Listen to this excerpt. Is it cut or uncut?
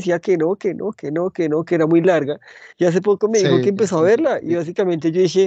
cut